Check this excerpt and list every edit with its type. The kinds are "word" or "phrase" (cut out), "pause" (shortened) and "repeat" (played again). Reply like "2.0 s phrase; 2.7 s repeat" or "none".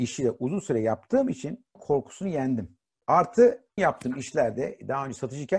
1.7 s word; 3.8 s word

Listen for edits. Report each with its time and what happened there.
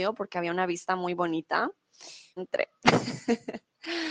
2.4 s phrase

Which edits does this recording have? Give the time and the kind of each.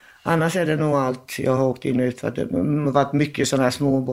none

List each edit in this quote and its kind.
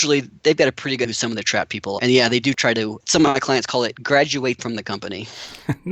1.0 s word; 2.0 s word; 3.0 s word; 4.6 s word

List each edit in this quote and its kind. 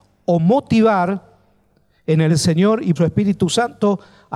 2.3 s word; 3.0 s word

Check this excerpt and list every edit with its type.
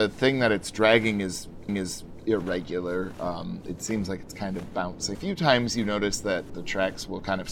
1.7 s repeat; 5.1 s phrase; 6.5 s word

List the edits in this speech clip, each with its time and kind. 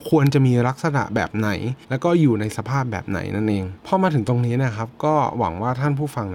1.8 s pause; 3.8 s pause

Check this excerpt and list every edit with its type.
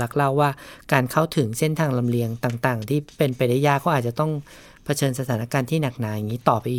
none

